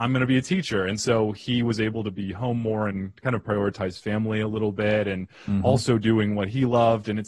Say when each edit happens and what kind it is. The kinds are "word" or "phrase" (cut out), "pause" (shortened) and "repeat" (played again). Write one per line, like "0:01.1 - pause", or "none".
none